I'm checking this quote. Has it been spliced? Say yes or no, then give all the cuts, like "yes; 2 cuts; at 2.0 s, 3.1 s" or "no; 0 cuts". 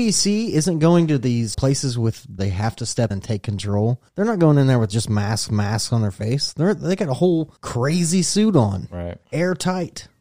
yes; 7 cuts; at 1.5 s, 2.4 s, 3.1 s, 4.1 s, 5.5 s, 7.6 s, 9.2 s